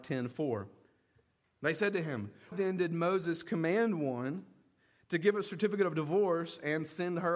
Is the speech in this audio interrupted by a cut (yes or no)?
yes